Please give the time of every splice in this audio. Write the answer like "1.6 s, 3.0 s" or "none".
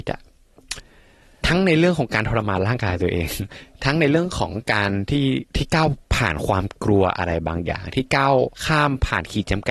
5.5 s, 6.0 s, 8.5 s